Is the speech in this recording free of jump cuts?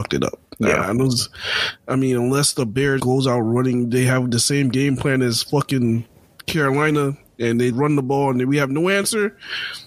no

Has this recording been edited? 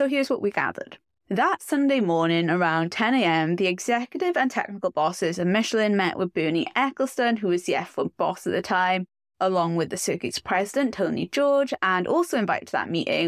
no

